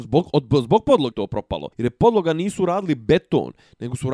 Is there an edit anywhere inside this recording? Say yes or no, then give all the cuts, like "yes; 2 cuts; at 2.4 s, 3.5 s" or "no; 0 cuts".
yes; 2 cuts; at 1.1 s, 1.7 s